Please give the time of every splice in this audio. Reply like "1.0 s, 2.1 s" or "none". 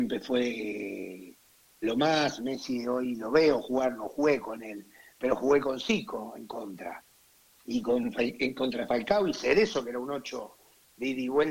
none